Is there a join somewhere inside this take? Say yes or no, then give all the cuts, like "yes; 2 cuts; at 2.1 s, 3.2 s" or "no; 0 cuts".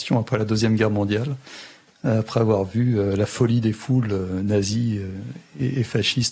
no; 0 cuts